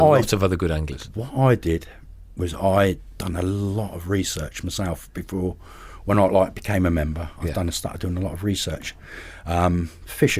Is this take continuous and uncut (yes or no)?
yes